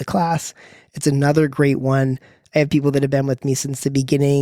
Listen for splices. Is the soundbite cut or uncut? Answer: uncut